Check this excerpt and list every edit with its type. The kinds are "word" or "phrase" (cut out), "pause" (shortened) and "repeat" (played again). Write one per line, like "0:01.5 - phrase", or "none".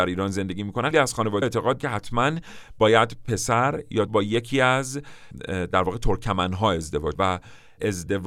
0:00.9 - word
0:01.4 - word
0:01.8 - word
0:04.1 - word
0:07.1 - word